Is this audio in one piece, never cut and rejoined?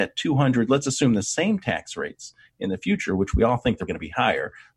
no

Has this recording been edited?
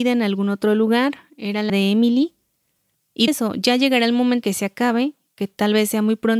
yes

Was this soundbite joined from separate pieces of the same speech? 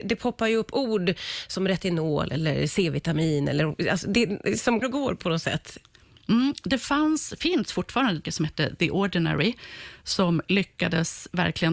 yes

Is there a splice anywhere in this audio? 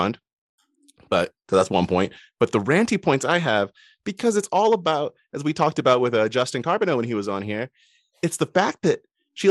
no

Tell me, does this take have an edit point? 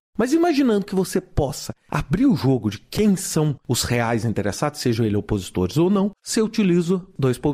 no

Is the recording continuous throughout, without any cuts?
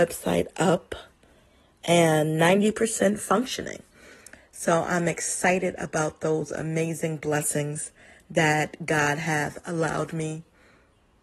yes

